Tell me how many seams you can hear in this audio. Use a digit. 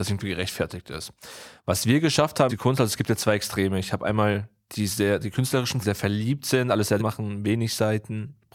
3